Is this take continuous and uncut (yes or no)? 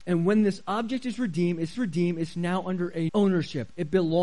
no